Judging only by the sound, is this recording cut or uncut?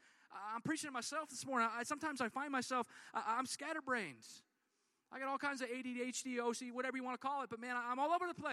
uncut